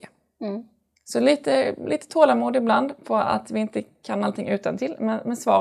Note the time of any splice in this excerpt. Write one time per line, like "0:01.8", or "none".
0:00.9